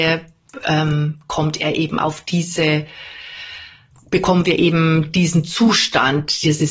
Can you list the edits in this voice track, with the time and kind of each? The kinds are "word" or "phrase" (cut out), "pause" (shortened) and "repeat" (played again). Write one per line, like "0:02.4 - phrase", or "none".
none